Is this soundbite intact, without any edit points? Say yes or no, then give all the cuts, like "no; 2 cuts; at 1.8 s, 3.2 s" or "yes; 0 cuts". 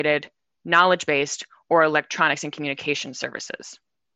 yes; 0 cuts